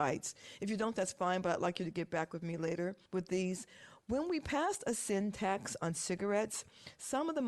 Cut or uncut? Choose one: cut